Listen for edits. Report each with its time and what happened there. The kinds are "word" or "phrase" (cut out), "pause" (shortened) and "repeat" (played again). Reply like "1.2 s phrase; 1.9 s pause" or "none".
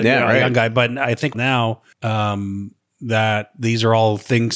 1.3 s word; 1.9 s pause